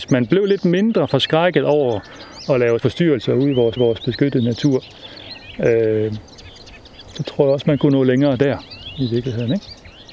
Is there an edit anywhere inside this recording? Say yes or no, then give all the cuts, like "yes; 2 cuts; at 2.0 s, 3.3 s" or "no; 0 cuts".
yes; 2 cuts; at 2.8 s, 3.8 s